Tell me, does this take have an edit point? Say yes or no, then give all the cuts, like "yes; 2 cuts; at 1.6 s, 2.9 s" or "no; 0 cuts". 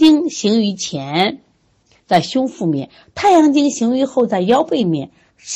no; 0 cuts